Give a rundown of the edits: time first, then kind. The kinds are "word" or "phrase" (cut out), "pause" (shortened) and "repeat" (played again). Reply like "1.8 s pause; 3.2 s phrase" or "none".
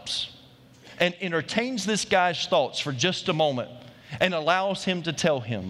none